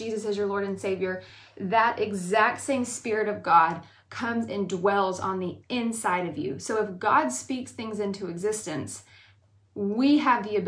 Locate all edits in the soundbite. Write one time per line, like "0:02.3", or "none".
none

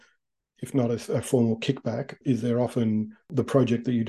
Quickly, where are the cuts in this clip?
0:02.2

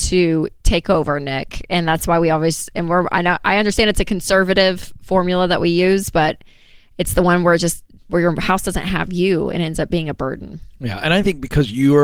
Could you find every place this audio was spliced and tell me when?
none

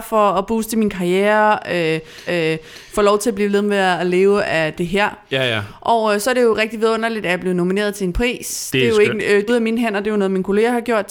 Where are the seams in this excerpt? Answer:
0:02.3
0:09.5

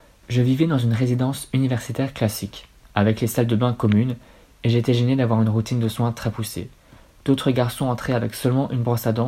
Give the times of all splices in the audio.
none

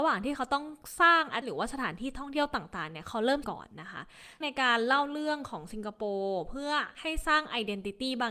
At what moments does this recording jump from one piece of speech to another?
0:01.4
0:03.4
0:04.4

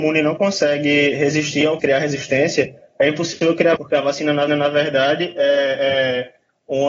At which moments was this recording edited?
0:01.8
0:03.8
0:04.5

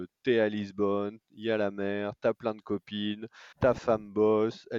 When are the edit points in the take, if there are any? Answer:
0:03.5

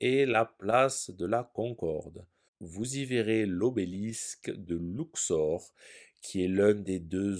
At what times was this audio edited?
none

